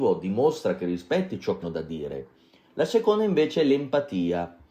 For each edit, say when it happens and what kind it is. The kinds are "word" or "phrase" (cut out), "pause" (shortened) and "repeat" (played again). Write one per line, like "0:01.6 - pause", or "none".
0:01.6 - word